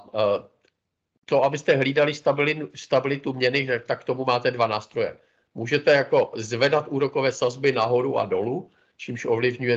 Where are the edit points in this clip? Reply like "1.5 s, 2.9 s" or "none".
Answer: none